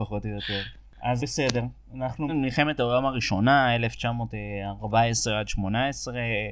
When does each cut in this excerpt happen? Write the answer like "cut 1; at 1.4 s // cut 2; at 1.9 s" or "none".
cut 1; at 1.2 s // cut 2; at 2.3 s